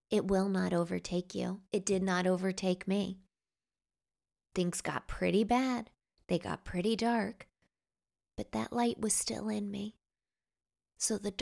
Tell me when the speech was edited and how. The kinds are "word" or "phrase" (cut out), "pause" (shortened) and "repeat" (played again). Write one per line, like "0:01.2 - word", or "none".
none